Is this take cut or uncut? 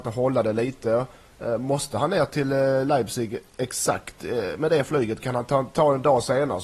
uncut